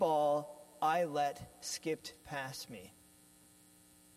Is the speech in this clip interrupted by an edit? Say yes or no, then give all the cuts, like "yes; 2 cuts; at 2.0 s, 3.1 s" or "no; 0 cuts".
yes; 1 cut; at 2.2 s